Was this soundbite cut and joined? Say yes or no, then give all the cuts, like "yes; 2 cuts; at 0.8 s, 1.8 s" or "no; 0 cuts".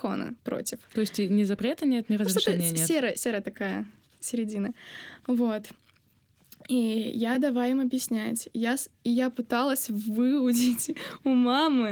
no; 0 cuts